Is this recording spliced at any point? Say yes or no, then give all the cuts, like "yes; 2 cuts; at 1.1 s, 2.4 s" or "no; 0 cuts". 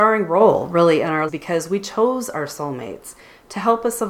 yes; 1 cut; at 1.3 s